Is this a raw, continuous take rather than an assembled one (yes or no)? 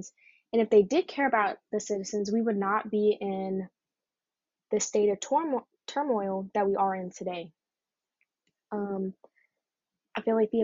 yes